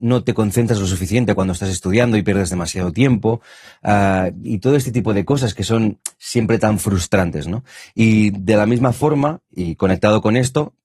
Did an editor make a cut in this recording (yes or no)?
no